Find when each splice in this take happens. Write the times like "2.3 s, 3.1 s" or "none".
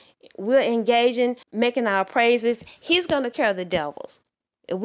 1.4 s, 3.3 s

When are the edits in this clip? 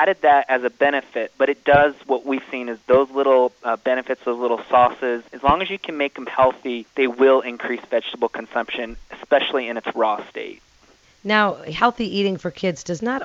5.3 s, 6.9 s

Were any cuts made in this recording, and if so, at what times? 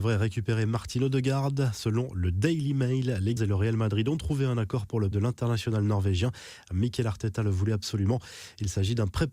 3.4 s, 5.1 s

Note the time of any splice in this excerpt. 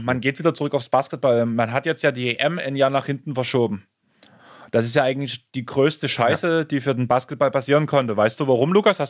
none

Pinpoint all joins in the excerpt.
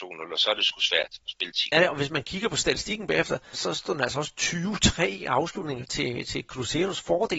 1.7 s, 3.5 s

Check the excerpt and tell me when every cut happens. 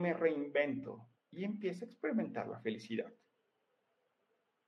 1.2 s

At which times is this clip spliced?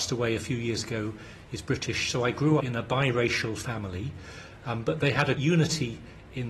2.6 s, 5.4 s

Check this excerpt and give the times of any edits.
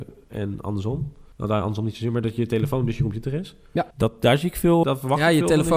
1.3 s, 3.9 s, 4.8 s

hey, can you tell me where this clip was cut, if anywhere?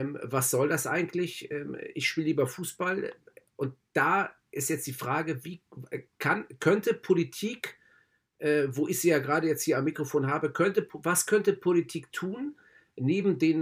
none

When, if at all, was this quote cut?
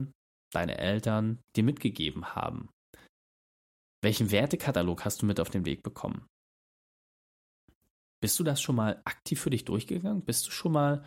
1.4 s

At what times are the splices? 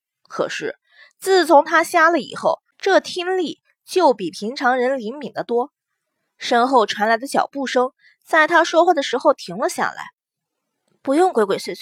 2.7 s

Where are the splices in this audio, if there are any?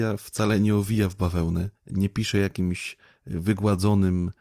1.8 s

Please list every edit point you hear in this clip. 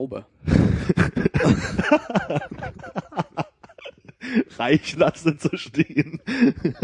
4.9 s

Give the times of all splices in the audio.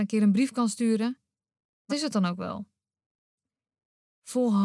1.9 s

